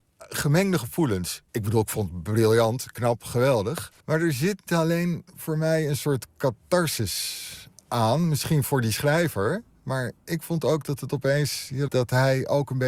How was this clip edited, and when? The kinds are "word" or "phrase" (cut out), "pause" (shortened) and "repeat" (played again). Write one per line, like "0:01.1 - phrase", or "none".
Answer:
0:01.5 - pause
0:04.0 - pause
0:04.7 - word
0:11.9 - word

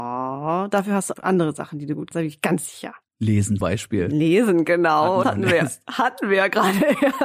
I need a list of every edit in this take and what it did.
0:01.1 - word
0:02.1 - word
0:03.6 - word
0:05.2 - word

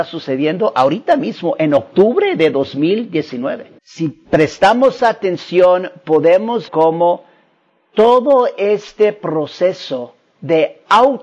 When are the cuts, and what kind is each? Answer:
0:03.8 - pause
0:06.7 - word

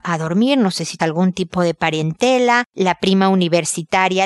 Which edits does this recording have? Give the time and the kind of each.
0:01.0 - phrase

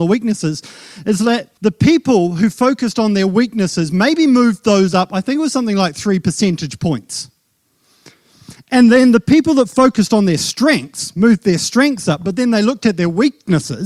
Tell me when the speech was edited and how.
0:01.6 - pause

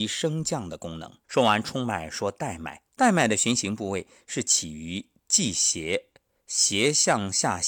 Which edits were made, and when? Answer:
0:01.2 - pause
0:02.9 - pause

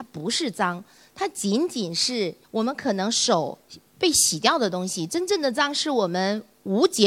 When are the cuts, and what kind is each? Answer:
0:02.4 - pause

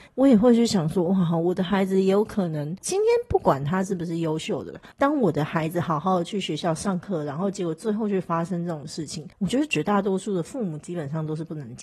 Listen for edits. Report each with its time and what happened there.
0:04.9 - pause
0:09.3 - pause

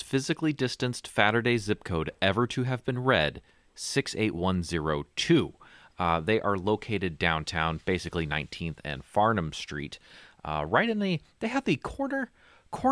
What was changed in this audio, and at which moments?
none

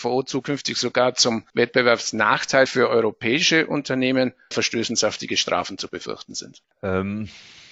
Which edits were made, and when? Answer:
0:01.5 - pause
0:04.5 - word
0:06.6 - pause

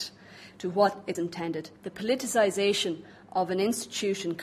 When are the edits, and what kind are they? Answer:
0:01.1 - word
0:01.8 - pause

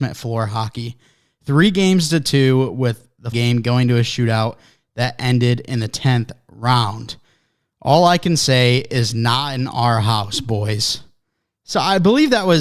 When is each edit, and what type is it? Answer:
0:03.3 - word

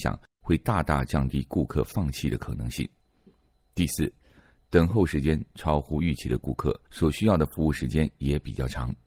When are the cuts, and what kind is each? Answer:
0:06.9 - pause

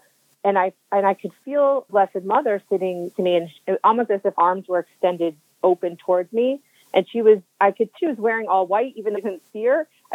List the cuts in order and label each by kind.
0:01.9 - word
0:03.1 - word
0:04.3 - word
0:08.0 - word
0:09.2 - word

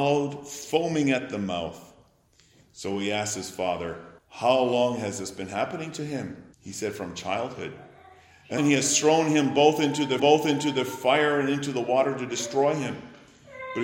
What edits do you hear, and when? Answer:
0:04.2 - pause
0:06.5 - pause
0:08.6 - word
0:10.2 - repeat

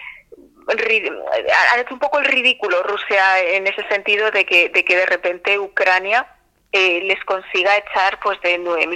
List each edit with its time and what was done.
none

